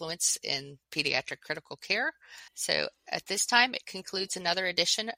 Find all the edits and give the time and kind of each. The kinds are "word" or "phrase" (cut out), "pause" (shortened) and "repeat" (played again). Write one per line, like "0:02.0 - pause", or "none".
0:02.5 - pause